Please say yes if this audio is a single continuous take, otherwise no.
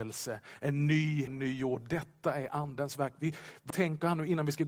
no